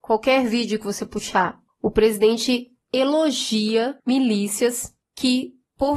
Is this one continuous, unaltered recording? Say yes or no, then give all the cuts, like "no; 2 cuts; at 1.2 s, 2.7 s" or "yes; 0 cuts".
no; 1 cut; at 4.0 s